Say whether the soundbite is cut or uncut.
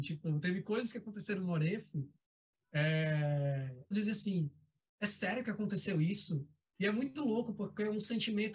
cut